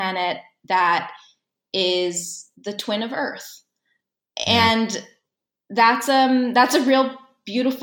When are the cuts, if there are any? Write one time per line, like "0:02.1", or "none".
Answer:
0:02.5